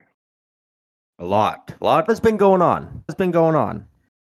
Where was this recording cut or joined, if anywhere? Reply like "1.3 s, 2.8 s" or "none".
2.1 s, 3.1 s